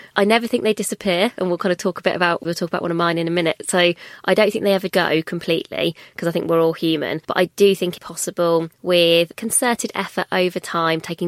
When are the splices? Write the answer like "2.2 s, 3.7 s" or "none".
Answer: 2.4 s, 4.9 s, 7.2 s, 8.0 s, 8.7 s